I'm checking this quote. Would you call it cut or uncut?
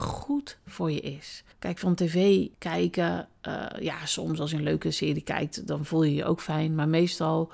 cut